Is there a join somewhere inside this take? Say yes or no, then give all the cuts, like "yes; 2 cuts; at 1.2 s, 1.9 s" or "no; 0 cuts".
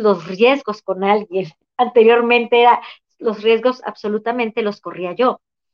no; 0 cuts